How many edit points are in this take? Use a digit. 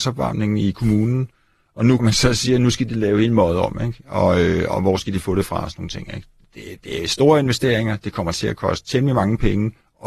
2